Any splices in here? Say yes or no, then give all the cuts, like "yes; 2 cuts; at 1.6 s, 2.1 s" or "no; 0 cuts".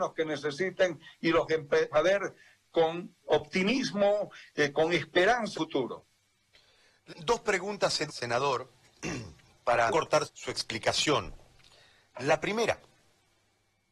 yes; 8 cuts; at 1.5 s, 1.9 s, 3.2 s, 5.5 s, 7.1 s, 8.1 s, 9.9 s, 10.2 s